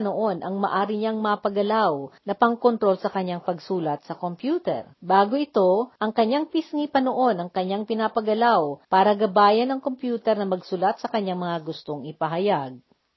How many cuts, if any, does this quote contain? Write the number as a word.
four